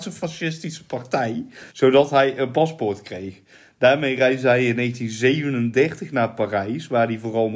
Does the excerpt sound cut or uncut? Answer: cut